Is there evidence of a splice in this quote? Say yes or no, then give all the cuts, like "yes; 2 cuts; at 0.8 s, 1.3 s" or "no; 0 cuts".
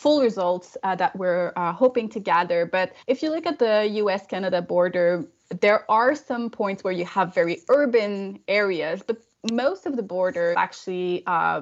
yes; 2 cuts; at 3.0 s, 10.5 s